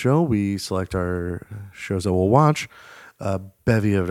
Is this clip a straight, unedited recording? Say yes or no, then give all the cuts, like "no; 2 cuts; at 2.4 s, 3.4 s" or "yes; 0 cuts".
yes; 0 cuts